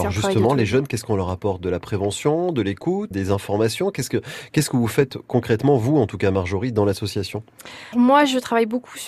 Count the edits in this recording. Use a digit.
2